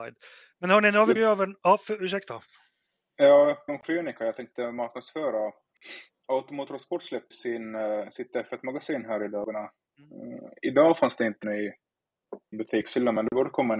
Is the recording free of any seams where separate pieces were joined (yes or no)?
no